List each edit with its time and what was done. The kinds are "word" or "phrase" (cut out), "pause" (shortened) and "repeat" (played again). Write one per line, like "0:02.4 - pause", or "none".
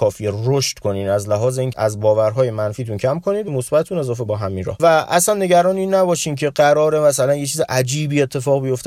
0:01.7 - word
0:03.5 - word
0:04.3 - word
0:04.8 - word